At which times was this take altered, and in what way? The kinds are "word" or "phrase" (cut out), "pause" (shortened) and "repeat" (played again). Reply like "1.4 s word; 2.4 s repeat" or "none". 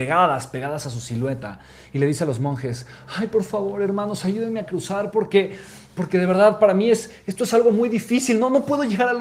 none